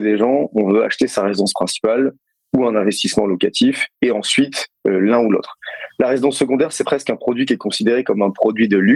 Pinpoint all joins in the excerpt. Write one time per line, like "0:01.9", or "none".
none